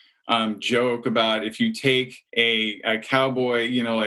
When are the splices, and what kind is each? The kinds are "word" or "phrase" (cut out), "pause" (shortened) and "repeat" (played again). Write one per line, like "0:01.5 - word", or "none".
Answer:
0:02.3 - pause